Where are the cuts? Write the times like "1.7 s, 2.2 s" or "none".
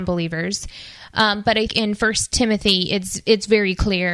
1.7 s